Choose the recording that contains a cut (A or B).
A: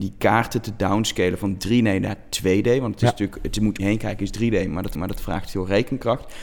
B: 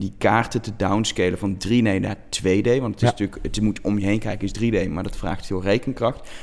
A